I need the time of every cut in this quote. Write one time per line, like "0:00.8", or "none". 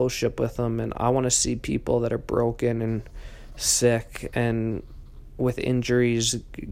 none